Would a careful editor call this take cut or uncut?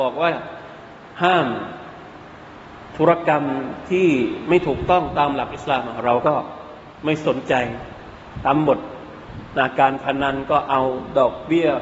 cut